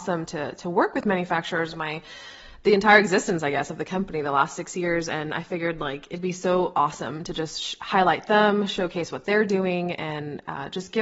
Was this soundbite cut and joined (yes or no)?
no